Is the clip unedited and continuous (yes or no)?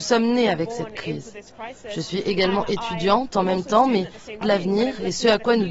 no